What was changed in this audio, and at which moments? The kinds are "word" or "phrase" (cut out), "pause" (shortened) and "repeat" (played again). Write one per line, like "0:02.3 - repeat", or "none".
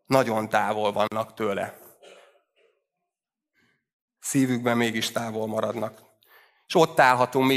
none